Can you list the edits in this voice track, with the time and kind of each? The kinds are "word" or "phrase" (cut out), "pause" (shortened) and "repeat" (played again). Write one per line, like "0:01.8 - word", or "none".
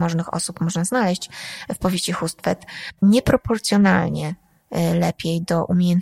none